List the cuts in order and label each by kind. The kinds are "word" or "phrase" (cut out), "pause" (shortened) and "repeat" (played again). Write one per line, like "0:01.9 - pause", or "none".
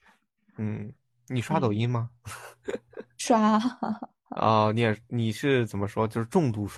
none

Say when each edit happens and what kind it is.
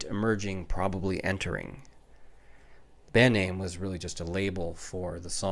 none

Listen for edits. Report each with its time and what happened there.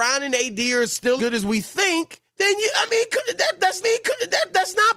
0:01.2 - word
0:02.3 - pause
0:03.8 - repeat

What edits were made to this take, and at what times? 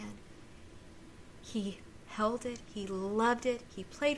none

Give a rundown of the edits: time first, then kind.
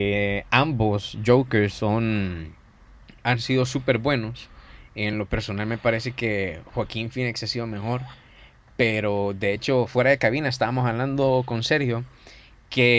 none

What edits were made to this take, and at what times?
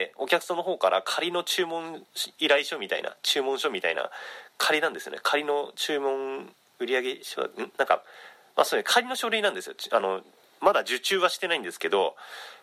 none

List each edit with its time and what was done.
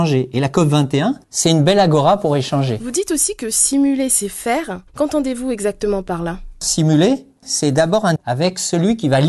0:01.2 - pause
0:04.9 - pause
0:08.2 - word

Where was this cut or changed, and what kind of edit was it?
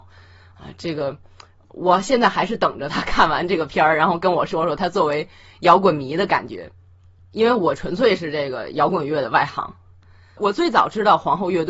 none

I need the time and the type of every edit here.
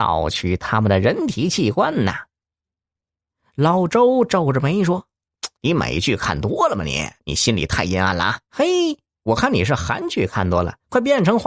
0:05.5 - pause
0:07.2 - pause
0:08.4 - pause

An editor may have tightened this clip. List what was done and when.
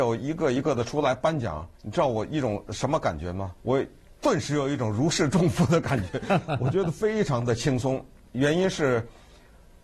0:01.7 - pause
0:03.6 - pause

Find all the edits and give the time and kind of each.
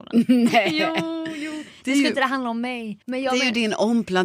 0:03.0 - pause

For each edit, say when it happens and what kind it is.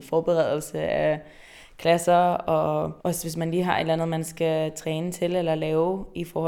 0:03.0 - pause

